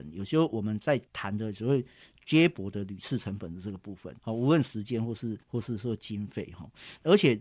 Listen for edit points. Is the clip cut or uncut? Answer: cut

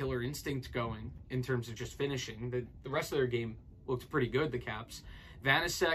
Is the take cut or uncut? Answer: uncut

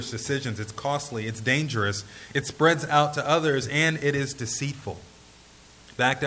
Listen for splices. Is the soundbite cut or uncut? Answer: uncut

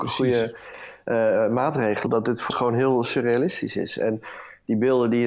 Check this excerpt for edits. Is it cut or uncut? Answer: cut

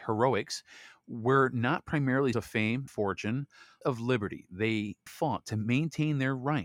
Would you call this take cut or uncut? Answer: cut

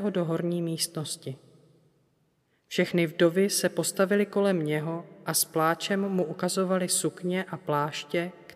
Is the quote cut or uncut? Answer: uncut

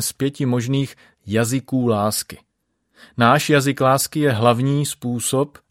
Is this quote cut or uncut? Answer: uncut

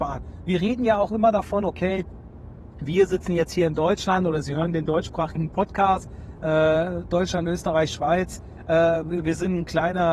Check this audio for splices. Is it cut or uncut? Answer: uncut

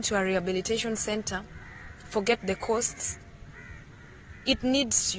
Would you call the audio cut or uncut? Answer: uncut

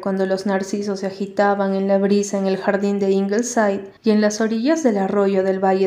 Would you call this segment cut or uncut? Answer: cut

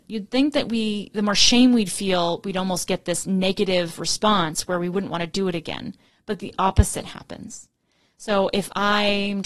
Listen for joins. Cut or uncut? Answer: uncut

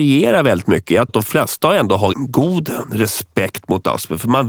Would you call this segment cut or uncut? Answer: cut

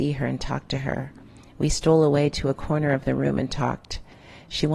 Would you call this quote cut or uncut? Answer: uncut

